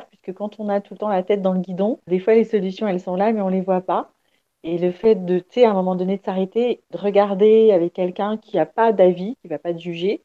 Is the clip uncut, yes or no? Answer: no